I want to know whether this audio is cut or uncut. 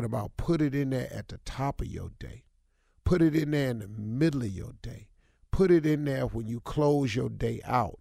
uncut